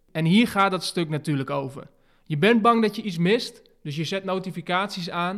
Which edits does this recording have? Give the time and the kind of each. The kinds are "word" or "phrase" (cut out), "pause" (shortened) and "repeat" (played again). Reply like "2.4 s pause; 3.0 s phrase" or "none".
none